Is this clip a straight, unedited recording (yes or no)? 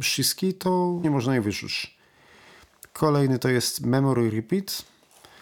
no